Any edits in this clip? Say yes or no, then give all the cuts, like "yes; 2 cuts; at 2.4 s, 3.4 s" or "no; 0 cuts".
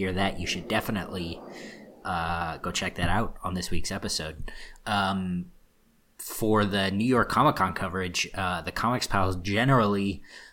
no; 0 cuts